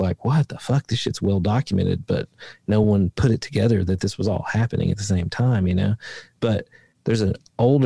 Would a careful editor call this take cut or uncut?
uncut